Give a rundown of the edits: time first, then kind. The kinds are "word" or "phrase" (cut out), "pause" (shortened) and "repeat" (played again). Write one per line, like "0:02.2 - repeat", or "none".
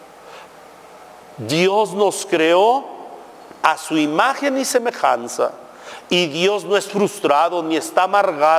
none